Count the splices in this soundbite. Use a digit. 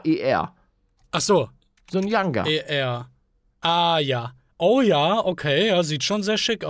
0